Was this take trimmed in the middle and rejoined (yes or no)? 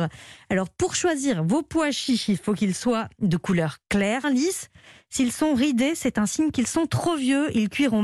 yes